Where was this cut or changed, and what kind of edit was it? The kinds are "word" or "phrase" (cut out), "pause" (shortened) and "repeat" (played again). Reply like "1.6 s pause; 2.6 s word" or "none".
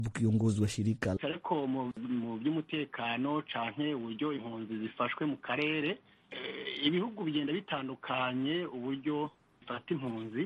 1.2 s phrase